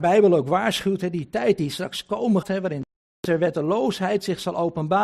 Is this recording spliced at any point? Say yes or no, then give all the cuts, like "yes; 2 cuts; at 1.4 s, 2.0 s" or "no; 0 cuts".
yes; 1 cut; at 2.4 s